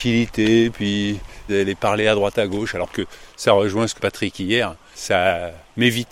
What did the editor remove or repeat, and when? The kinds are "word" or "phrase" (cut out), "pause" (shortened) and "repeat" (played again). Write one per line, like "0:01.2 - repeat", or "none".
0:01.5 - phrase
0:02.9 - word
0:04.0 - word